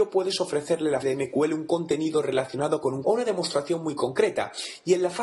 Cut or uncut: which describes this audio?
cut